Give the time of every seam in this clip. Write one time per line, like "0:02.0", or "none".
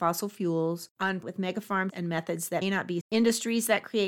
0:01.2
0:01.9
0:02.6
0:03.0

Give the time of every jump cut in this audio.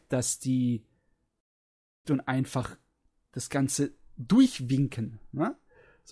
0:02.0

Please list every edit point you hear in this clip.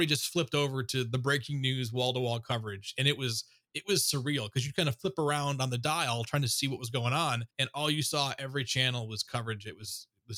0:07.5

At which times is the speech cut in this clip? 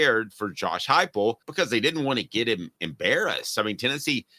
0:01.4

